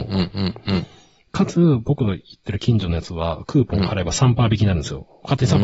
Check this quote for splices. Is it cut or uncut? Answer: cut